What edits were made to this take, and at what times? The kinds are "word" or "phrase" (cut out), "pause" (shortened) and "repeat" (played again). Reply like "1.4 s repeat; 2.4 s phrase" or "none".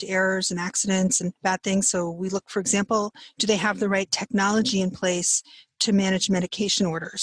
none